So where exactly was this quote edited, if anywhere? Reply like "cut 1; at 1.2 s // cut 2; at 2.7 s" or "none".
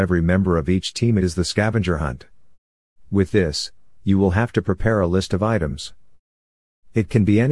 cut 1; at 1.2 s